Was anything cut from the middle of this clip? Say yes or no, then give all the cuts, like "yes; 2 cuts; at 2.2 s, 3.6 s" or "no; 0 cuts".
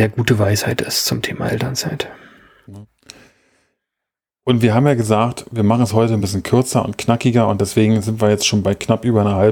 no; 0 cuts